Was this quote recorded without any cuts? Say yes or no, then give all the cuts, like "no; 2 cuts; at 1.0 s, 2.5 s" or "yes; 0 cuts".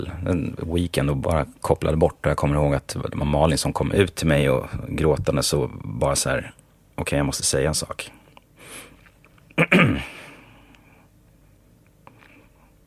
yes; 0 cuts